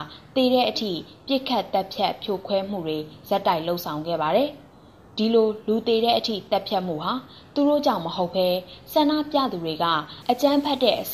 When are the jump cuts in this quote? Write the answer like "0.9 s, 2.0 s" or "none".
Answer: none